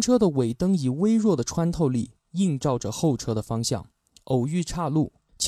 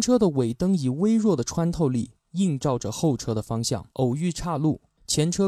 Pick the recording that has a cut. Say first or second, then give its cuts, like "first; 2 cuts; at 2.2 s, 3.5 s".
second; 1 cut; at 3.9 s